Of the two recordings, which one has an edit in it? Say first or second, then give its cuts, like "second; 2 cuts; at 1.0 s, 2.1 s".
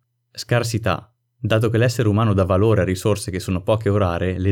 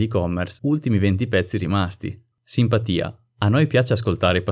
second; 1 cut; at 2.3 s